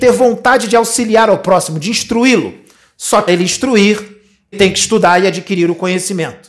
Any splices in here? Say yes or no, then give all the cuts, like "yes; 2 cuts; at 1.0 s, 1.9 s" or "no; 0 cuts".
yes; 2 cuts; at 3.3 s, 4.5 s